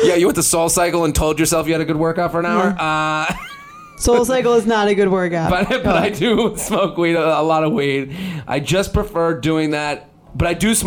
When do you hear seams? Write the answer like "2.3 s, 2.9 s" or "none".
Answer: none